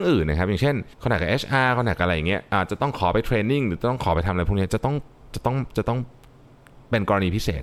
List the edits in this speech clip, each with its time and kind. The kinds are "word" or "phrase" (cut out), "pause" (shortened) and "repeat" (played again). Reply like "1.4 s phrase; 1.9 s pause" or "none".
0.9 s pause

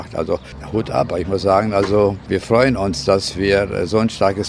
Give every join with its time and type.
none

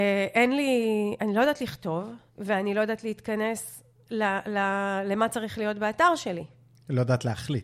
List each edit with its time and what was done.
2.3 s pause

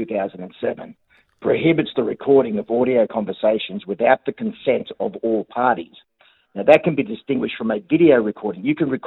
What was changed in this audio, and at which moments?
none

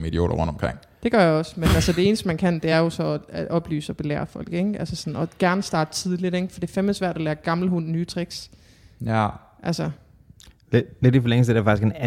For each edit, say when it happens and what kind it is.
none

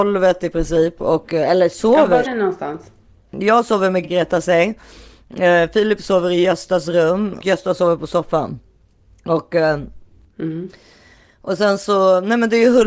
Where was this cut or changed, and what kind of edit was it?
2.2 s word; 4.0 s word; 7.4 s word

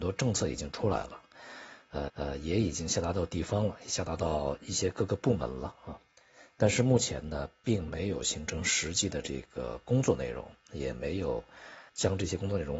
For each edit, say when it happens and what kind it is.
2.1 s repeat; 11.9 s pause

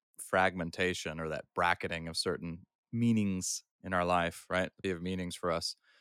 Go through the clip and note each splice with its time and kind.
4.8 s word

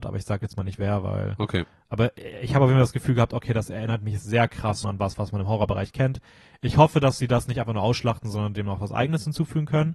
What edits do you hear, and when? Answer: 4.8 s word

